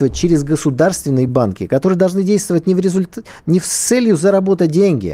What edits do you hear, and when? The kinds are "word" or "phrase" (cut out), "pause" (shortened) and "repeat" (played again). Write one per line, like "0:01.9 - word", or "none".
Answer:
none